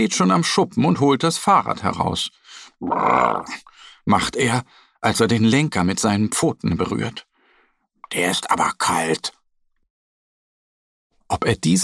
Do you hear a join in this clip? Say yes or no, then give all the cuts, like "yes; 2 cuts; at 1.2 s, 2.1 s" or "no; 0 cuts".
no; 0 cuts